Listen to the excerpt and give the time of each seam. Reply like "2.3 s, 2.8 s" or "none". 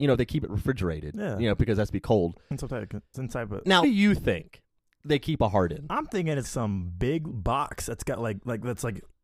3.8 s, 6.4 s

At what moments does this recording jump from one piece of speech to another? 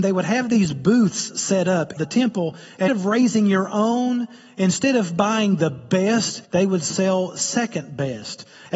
2.0 s, 2.9 s, 6.4 s

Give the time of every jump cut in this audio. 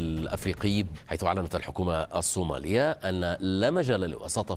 none

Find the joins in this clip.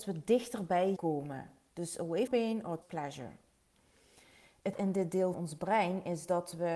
1.0 s, 2.3 s, 2.8 s, 4.7 s, 5.3 s

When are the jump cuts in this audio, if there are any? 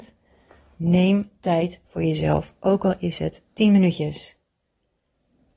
none

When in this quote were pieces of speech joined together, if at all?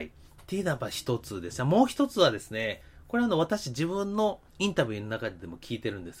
4.5 s

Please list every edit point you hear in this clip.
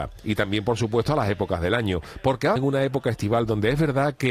2.6 s

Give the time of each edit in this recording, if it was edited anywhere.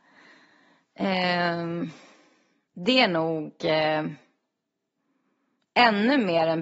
none

